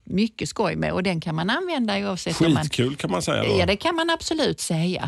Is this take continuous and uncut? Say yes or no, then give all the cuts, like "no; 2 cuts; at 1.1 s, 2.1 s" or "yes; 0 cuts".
yes; 0 cuts